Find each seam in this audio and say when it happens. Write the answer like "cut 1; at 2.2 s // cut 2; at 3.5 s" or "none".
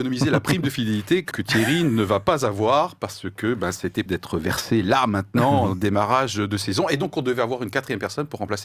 cut 1; at 1.3 s // cut 2; at 4.1 s